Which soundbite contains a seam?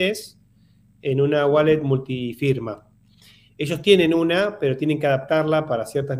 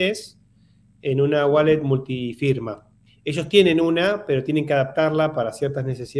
second; 1 cut; at 3.1 s

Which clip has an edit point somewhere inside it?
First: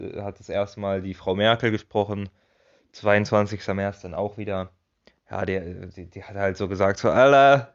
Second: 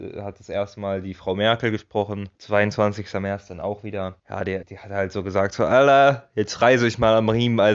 second; 3 cuts; at 2.3 s, 4.2 s, 4.6 s

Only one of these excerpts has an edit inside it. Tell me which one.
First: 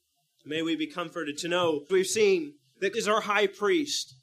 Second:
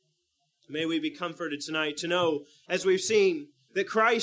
first; 3 cuts; at 1.4 s, 1.9 s, 2.9 s

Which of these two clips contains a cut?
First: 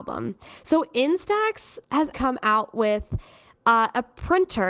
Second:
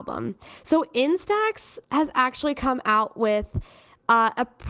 first; 1 cut; at 2.1 s

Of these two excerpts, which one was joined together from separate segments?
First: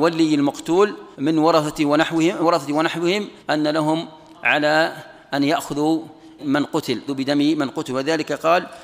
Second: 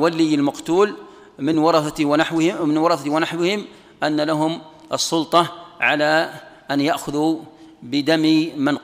first; 6 cuts; at 1.1 s, 2.4 s, 3.4 s, 4.3 s, 6.4 s, 7.1 s

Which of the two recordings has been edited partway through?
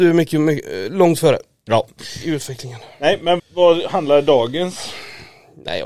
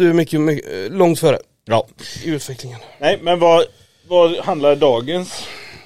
first; 1 cut; at 3.4 s

